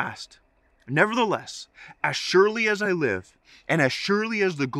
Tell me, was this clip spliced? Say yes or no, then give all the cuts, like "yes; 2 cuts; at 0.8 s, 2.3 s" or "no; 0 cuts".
no; 0 cuts